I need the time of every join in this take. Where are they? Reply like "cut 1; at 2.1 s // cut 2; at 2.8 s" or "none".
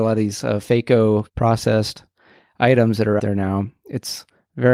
cut 1; at 1.3 s // cut 2; at 3.2 s